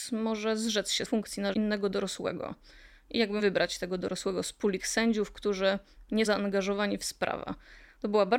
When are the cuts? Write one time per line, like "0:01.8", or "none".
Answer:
0:01.0
0:01.5
0:03.4
0:04.8
0:06.3